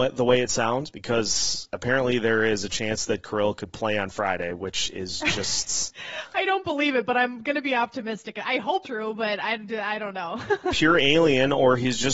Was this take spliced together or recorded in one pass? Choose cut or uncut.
cut